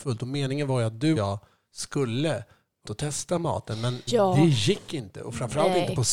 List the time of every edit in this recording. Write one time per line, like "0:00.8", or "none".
0:01.2
0:02.8
0:04.1